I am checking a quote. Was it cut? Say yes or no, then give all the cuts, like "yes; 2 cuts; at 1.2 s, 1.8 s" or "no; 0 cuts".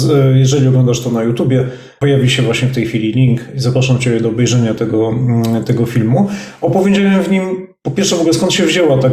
no; 0 cuts